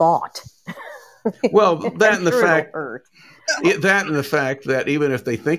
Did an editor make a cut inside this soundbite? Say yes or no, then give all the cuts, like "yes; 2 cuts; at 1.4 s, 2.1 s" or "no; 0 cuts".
no; 0 cuts